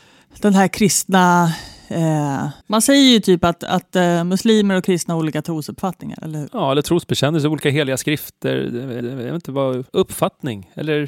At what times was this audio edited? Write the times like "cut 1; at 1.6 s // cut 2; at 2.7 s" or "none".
cut 1; at 2.6 s // cut 2; at 9.0 s // cut 3; at 9.9 s